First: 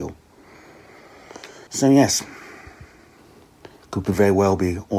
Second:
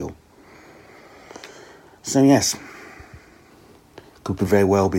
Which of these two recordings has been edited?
first; 1 cut; at 1.7 s

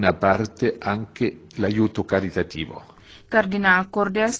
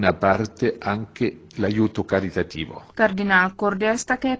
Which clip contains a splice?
second; 1 cut; at 2.9 s

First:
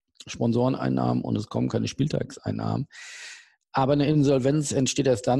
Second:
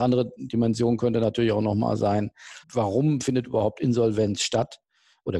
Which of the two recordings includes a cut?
second; 1 cut; at 2.6 s

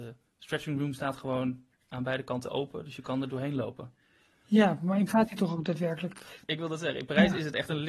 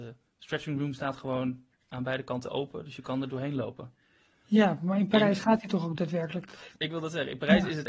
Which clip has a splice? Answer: first; 1 cut; at 5.1 s

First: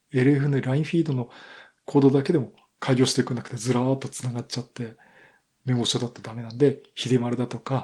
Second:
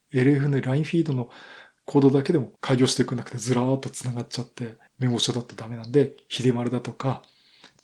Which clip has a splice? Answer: second; 2 cuts; at 2.6 s, 4.9 s

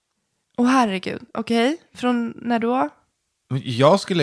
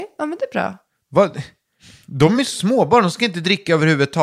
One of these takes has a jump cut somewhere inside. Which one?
first; 1 cut; at 2.6 s

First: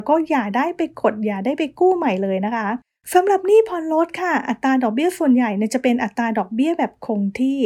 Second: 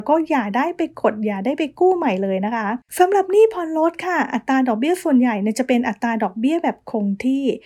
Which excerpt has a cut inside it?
second; 1 cut; at 2.9 s

